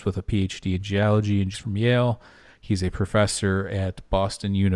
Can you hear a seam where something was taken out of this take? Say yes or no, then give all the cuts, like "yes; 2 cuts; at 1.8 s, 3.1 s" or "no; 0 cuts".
yes; 1 cut; at 1.5 s